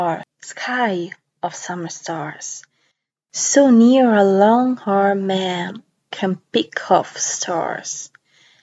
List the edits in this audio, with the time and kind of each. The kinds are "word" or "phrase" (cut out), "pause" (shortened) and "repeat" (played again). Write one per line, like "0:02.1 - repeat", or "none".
none